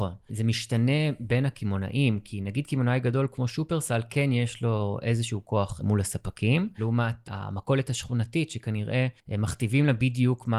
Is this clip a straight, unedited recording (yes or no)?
no